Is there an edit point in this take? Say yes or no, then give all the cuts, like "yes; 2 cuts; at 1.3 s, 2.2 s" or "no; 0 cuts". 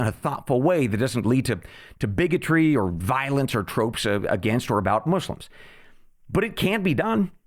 no; 0 cuts